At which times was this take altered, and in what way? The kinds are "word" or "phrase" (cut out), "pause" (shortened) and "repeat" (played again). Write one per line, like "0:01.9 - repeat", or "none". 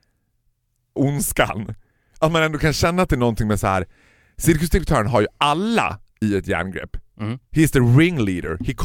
0:01.0 - word